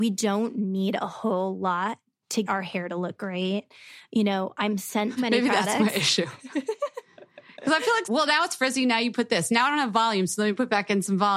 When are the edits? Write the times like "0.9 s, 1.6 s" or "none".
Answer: 2.5 s, 5.2 s, 8.0 s